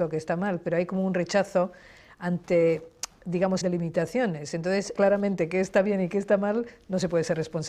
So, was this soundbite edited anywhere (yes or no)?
yes